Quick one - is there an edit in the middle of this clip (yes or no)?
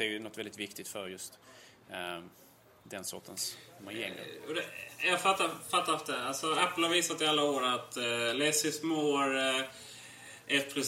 no